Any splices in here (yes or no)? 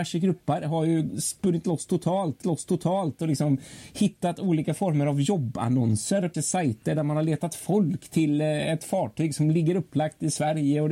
yes